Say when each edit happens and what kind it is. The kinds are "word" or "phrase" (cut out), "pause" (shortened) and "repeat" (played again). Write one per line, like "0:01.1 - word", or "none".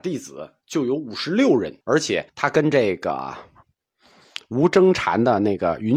0:01.8 - pause
0:02.3 - pause